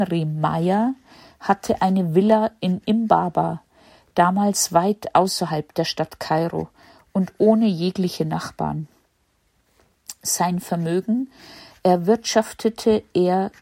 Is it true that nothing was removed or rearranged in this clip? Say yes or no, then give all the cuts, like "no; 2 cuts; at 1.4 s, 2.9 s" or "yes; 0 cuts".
yes; 0 cuts